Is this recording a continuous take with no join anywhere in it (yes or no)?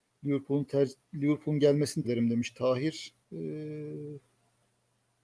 no